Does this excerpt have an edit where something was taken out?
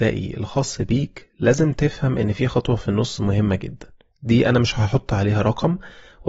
no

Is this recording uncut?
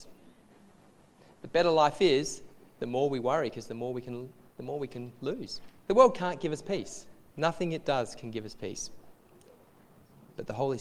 no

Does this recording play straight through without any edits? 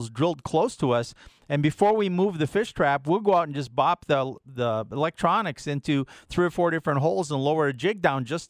yes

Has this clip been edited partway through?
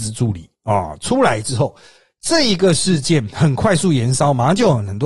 no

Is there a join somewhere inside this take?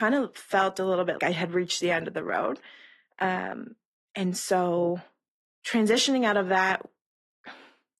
yes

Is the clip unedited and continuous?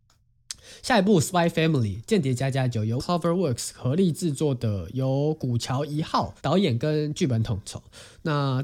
no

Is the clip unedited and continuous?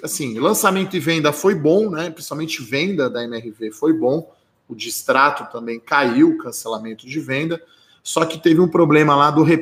yes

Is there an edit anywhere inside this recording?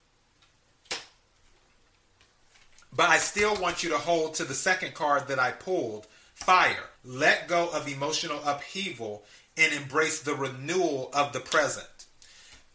yes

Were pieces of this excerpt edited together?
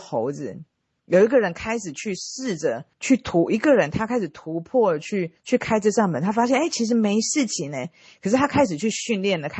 yes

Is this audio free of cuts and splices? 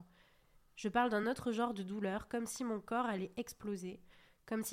yes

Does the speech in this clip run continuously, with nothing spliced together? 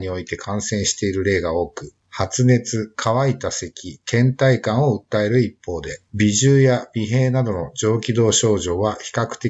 no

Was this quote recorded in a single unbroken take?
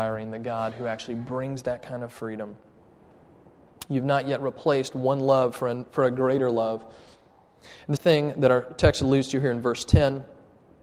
no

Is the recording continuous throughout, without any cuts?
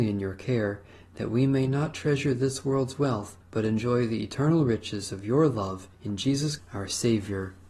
no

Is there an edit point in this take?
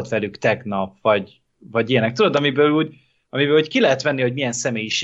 no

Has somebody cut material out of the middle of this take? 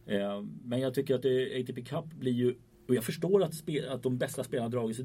yes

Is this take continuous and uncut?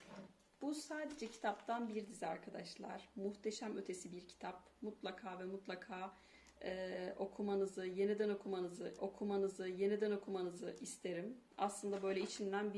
no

